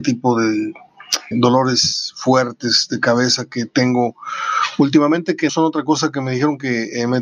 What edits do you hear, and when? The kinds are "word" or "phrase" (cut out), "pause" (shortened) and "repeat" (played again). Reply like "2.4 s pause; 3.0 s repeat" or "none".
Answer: 1.3 s word; 5.5 s word